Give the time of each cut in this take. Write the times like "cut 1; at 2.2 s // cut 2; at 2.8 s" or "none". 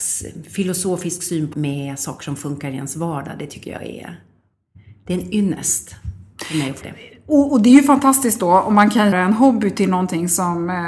cut 1; at 1.5 s // cut 2; at 6.8 s // cut 3; at 9.1 s

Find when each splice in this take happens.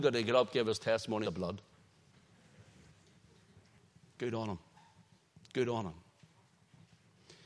cut 1; at 1.2 s // cut 2; at 5.2 s

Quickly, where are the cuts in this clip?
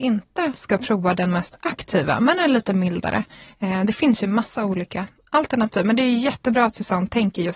none

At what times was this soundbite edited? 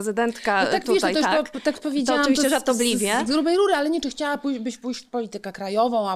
none

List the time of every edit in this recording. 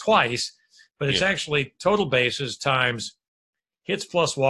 none

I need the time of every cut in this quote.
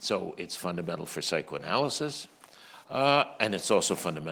none

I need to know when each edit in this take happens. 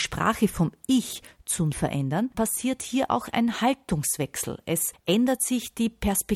cut 1; at 1.7 s // cut 2; at 2.3 s

